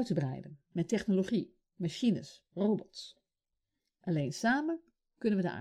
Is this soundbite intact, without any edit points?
yes; 0 cuts

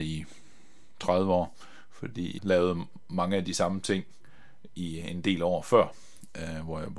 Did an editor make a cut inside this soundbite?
yes; 1 cut; at 2.4 s

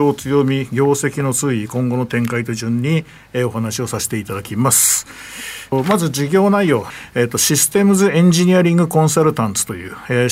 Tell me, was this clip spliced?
no; 0 cuts

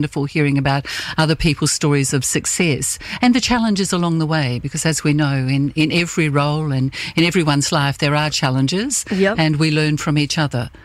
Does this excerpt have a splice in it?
no; 0 cuts

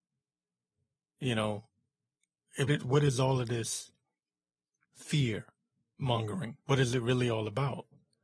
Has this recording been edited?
yes; 2 cuts; at 2.7 s, 6.6 s

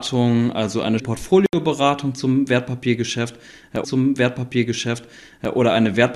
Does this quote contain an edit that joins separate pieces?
yes; 2 cuts; at 1.0 s, 3.8 s

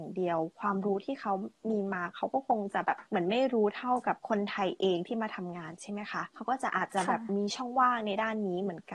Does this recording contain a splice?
yes; 3 cuts; at 3.1 s, 4.2 s, 6.3 s

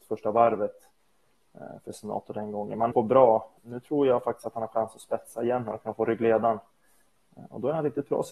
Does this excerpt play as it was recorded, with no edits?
no; 2 cuts; at 2.9 s, 3.6 s

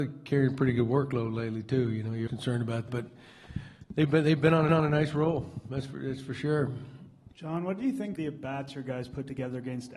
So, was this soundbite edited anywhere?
yes; 5 cuts; at 2.3 s, 2.9 s, 4.7 s, 7.3 s, 8.2 s

